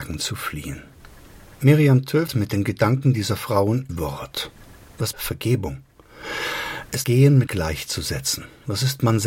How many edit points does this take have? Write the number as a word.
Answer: five